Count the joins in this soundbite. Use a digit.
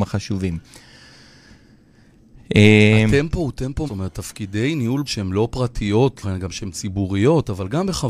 3